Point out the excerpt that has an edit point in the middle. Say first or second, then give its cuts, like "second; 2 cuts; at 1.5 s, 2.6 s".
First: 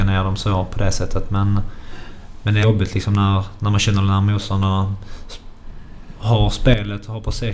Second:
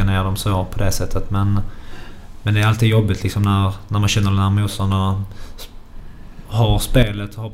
first; 1 cut; at 2.6 s